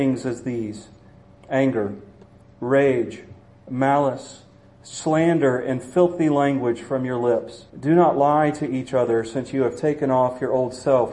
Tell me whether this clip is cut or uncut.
cut